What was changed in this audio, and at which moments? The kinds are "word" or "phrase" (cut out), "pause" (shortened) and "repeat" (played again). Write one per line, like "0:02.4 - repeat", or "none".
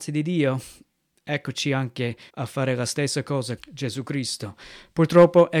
0:02.3 - pause
0:03.6 - word